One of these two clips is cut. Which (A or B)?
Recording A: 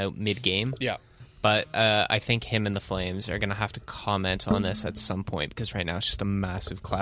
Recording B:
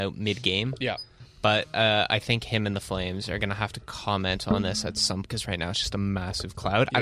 B